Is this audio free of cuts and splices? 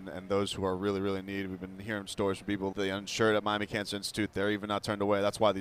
no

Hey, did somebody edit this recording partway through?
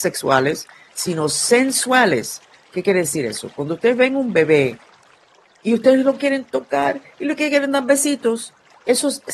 no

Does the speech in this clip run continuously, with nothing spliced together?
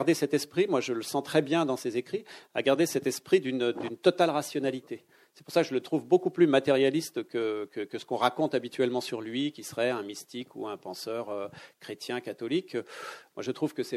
yes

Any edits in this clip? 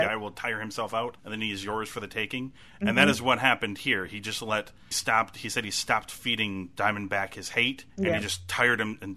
yes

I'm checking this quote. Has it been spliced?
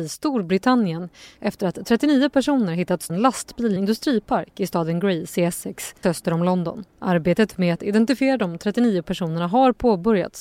yes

